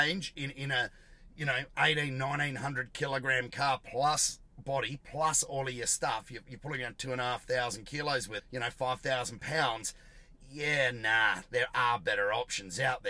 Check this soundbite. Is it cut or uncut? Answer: cut